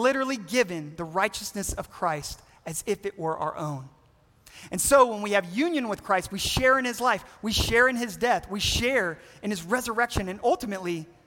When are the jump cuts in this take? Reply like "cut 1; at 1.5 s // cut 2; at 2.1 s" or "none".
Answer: none